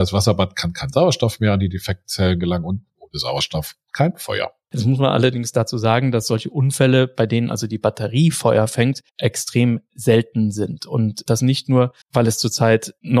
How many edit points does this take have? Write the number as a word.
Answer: two